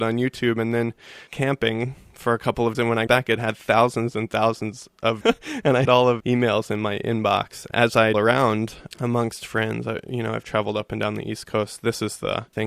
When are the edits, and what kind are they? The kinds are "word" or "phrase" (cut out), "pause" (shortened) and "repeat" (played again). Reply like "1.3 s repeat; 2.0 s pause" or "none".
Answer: 1.3 s word; 2.7 s word; 3.1 s word; 5.2 s word; 5.8 s word; 6.2 s word; 7.7 s word; 8.1 s word